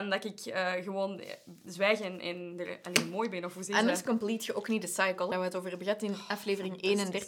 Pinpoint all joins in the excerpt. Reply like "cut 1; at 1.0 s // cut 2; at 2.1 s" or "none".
cut 1; at 5.3 s